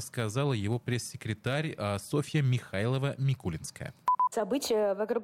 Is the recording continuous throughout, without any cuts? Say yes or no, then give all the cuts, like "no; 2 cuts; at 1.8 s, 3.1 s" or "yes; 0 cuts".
yes; 0 cuts